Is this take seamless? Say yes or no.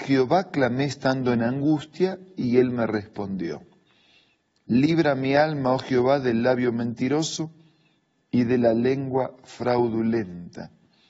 yes